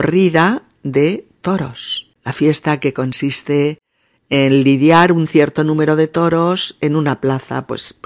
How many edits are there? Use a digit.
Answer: 1